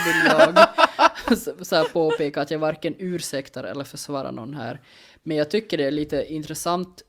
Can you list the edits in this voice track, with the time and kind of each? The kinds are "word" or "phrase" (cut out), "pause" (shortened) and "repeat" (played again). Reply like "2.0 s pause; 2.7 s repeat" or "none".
none